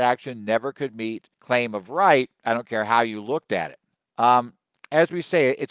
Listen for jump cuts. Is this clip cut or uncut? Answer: cut